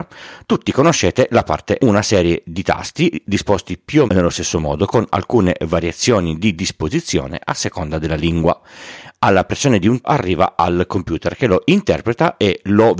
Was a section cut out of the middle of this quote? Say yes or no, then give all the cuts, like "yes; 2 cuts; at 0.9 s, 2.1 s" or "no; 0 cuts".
yes; 3 cuts; at 1.8 s, 4.1 s, 10.0 s